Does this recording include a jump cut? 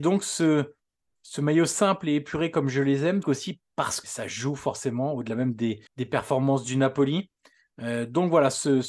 yes; 3 cuts; at 3.2 s, 4.0 s, 5.9 s

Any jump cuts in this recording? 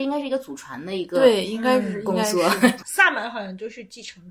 yes; 1 cut; at 2.8 s

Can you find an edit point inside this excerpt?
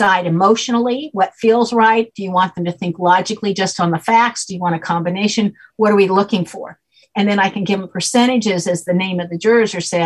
no; 0 cuts

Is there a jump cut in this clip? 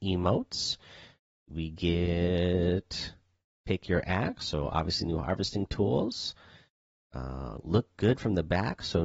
no; 0 cuts

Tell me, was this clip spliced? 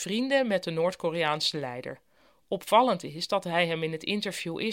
no; 0 cuts

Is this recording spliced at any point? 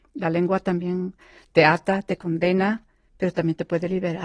no; 0 cuts

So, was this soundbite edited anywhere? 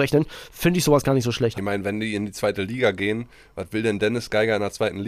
no; 0 cuts

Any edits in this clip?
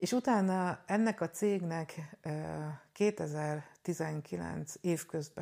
no; 0 cuts

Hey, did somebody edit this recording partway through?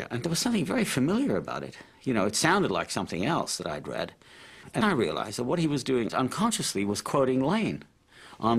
yes; 2 cuts; at 4.8 s, 6.1 s

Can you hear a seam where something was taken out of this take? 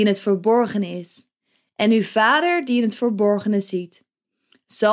no; 0 cuts

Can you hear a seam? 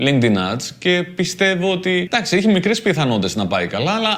no; 0 cuts

